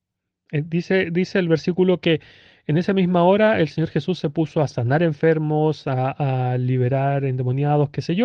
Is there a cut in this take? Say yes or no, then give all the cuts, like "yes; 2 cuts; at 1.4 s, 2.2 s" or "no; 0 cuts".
no; 0 cuts